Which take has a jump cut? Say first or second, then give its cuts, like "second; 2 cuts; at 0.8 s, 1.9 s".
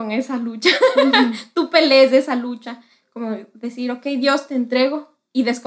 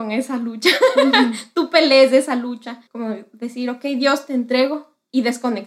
second; 1 cut; at 2.9 s